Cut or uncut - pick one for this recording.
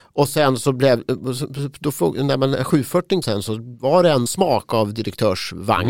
cut